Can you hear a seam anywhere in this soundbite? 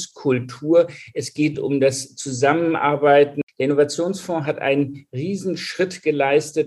no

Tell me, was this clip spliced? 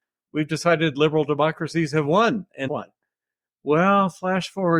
yes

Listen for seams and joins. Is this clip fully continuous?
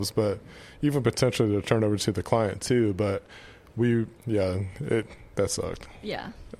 no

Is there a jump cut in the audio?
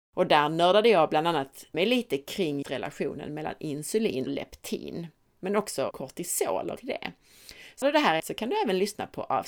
yes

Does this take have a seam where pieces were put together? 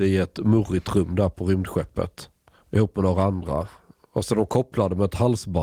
no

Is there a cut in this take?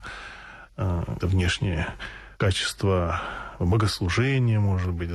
yes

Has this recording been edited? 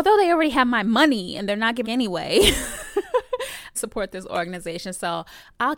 yes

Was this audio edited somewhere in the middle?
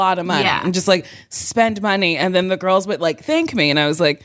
no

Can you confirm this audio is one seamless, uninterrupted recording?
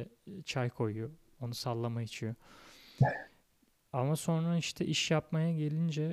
yes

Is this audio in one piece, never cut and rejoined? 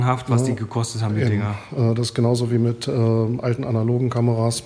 yes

